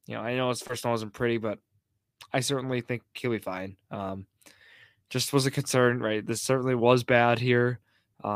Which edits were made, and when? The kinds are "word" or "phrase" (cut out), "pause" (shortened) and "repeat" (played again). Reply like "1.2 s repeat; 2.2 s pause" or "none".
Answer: none